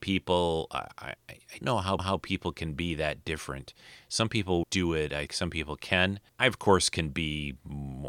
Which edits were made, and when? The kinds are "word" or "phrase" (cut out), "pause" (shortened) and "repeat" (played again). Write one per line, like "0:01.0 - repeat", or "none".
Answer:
0:01.2 - word
0:01.6 - word
0:02.0 - repeat
0:04.6 - word
0:05.3 - word
0:06.3 - pause